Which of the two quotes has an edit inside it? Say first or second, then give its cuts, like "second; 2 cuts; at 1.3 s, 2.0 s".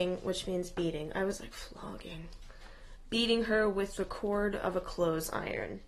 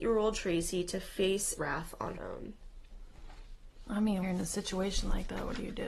second; 3 cuts; at 1.6 s, 2.2 s, 4.2 s